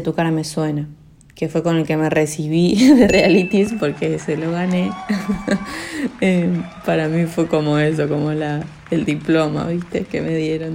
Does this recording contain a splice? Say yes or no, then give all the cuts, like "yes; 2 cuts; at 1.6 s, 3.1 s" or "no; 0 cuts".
no; 0 cuts